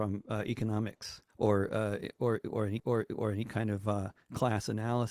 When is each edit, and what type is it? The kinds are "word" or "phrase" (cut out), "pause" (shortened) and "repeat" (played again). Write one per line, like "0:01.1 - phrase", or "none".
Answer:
0:01.3 - pause
0:02.8 - repeat